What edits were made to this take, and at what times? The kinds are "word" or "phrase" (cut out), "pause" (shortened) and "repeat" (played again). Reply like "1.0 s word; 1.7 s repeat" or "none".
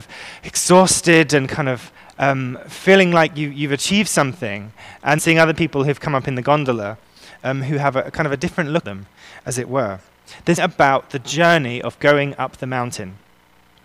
5.2 s word; 8.8 s word; 10.6 s word